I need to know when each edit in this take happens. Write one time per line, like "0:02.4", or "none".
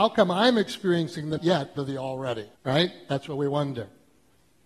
0:01.4
0:01.8
0:02.5